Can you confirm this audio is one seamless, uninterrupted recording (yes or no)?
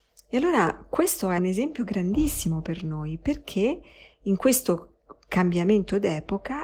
no